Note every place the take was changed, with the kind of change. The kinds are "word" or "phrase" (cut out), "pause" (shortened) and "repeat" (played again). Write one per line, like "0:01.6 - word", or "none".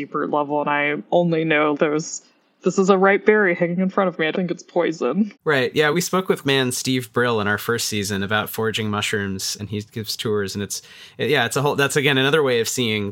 0:01.7 - word
0:04.3 - word
0:05.3 - word
0:05.9 - word
0:06.4 - word
0:09.6 - word